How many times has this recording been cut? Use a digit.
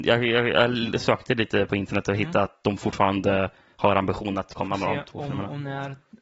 0